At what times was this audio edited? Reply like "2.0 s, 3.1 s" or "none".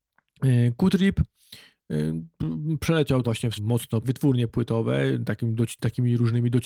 3.2 s, 3.6 s, 4.0 s